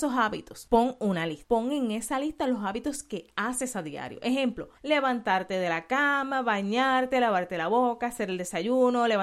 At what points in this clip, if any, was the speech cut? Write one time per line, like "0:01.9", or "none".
0:04.7